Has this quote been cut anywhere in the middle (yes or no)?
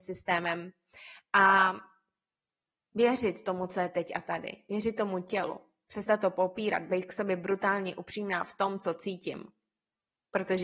no